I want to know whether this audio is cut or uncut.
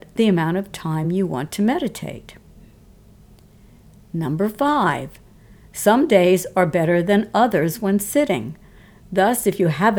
uncut